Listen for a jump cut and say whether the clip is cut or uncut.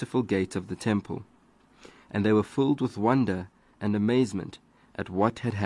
uncut